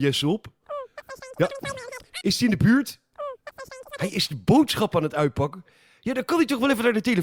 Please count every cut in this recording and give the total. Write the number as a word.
zero